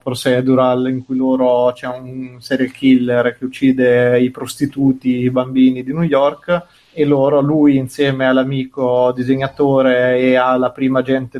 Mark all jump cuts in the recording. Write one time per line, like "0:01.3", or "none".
0:06.7